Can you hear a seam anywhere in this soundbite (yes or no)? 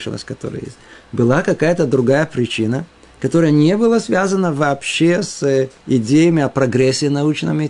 no